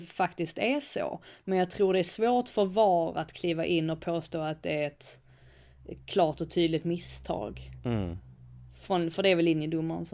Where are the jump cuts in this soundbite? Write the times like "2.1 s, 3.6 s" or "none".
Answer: none

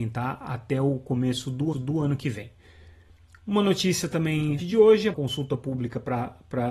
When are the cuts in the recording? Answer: 1.7 s, 4.6 s, 5.1 s

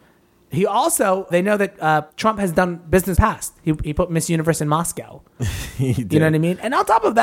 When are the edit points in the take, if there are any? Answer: 1.3 s, 2.1 s, 3.2 s

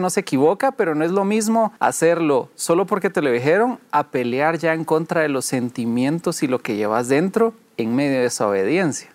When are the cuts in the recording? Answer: 1.8 s

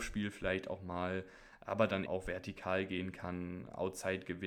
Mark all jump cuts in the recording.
2.1 s

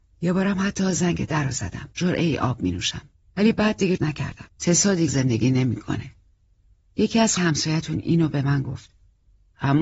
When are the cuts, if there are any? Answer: 1.9 s, 3.1 s, 4.0 s, 4.5 s, 5.1 s, 7.4 s

